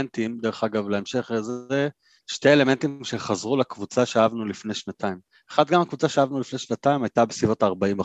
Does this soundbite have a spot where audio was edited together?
no; 0 cuts

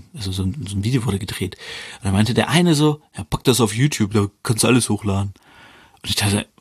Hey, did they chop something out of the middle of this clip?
no; 0 cuts

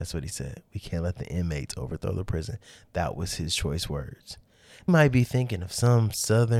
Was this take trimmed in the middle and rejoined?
yes; 1 cut; at 4.9 s

